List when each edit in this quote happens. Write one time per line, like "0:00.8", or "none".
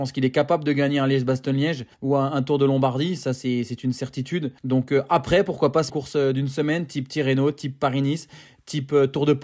0:01.9
0:04.6
0:05.9